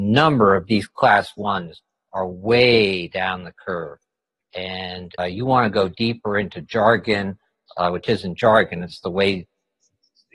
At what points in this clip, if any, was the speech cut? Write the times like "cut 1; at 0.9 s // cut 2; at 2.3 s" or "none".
cut 1; at 5.2 s